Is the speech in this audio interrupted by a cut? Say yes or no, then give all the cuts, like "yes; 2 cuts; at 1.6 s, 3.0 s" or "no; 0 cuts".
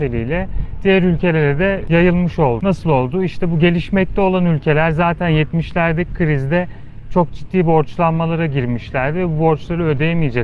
no; 0 cuts